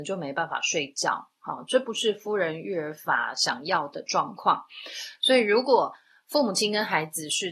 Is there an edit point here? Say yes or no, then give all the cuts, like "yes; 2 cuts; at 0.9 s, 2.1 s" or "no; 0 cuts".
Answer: no; 0 cuts